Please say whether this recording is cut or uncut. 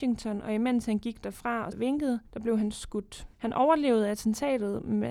cut